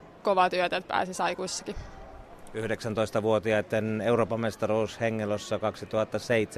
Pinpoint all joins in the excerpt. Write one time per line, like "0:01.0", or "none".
none